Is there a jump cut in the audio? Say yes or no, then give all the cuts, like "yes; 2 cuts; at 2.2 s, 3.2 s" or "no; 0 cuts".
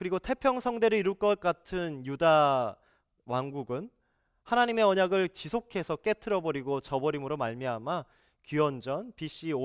no; 0 cuts